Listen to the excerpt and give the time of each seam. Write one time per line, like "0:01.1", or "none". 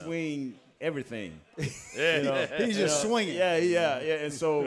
none

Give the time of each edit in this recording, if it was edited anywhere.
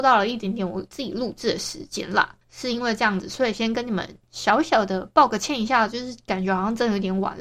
0:02.4

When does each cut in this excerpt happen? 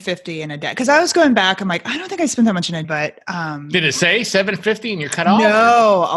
0:02.8

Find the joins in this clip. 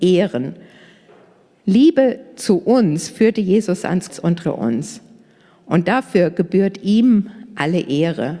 0:04.1
0:04.4

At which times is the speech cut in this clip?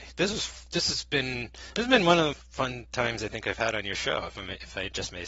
0:02.3

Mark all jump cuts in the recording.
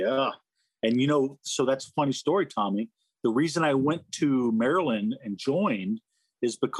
none

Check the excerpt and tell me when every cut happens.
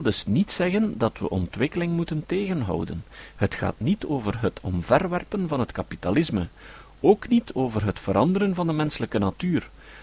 none

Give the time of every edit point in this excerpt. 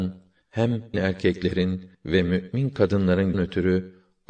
0:00.9
0:01.9
0:03.3

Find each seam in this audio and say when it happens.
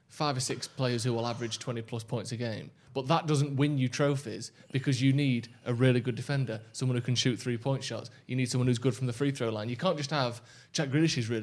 none

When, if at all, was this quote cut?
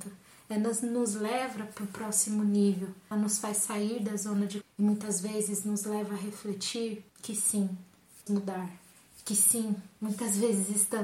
0:03.1
0:04.6
0:07.1
0:08.3

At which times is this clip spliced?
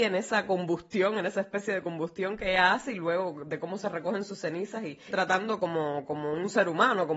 0:05.1

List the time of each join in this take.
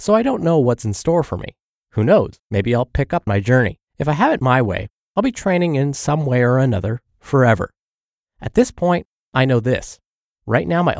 0:02.4
0:03.3
0:03.9

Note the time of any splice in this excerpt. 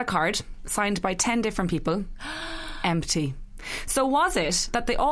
none

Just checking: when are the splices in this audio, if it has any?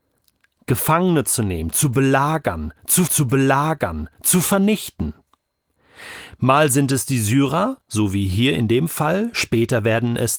0:03.1

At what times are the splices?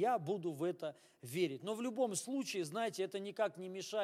none

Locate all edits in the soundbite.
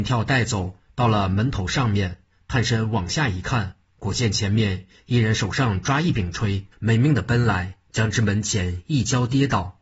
0:06.7

